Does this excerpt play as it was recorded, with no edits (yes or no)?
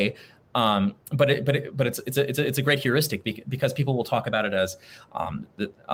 yes